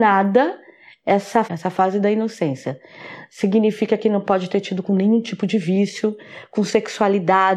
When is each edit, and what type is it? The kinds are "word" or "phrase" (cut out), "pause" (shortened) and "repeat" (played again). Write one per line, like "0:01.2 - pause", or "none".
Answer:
0:01.4 - phrase
0:04.8 - word